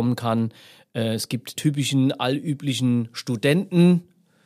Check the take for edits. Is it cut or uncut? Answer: cut